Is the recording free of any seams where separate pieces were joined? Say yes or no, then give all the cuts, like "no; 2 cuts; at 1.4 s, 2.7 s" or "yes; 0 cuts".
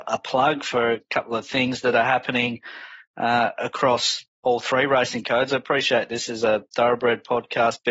yes; 0 cuts